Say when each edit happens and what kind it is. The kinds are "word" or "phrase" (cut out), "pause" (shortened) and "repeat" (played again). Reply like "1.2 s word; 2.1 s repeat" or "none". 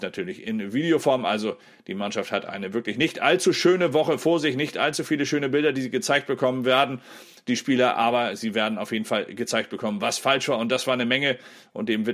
none